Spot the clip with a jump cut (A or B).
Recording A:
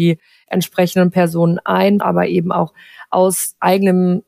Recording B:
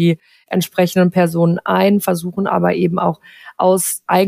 A